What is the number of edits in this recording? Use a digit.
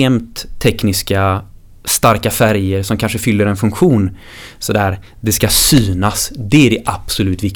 0